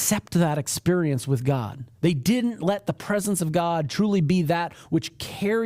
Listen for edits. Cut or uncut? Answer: cut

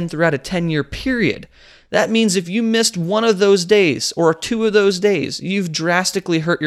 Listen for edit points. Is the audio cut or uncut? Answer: uncut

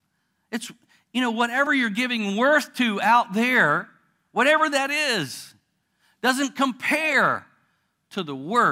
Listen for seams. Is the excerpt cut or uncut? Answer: uncut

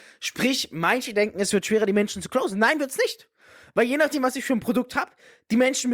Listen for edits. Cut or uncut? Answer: uncut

